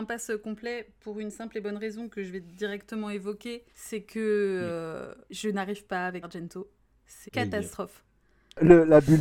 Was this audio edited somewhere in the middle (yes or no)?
yes